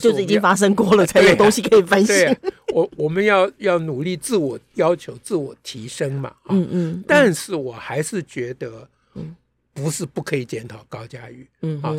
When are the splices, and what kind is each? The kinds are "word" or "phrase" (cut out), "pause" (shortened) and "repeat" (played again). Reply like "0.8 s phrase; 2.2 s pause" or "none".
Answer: none